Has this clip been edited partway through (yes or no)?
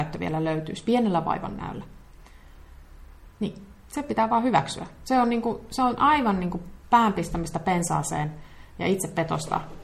yes